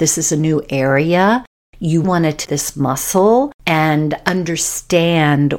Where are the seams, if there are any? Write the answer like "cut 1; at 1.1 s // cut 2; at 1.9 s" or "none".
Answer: cut 1; at 2.0 s // cut 2; at 2.4 s // cut 3; at 3.6 s